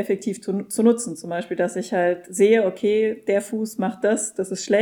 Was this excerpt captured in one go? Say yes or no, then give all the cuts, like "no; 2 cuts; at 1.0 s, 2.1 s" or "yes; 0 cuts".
yes; 0 cuts